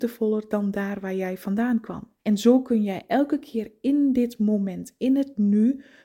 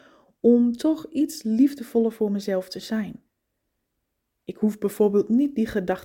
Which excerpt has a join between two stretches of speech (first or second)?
first